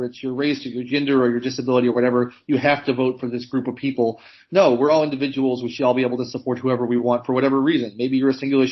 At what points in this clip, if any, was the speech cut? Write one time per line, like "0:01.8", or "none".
none